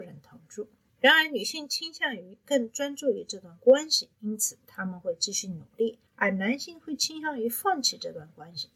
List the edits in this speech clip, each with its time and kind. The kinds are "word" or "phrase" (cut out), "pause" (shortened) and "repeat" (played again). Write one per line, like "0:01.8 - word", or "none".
0:04.1 - pause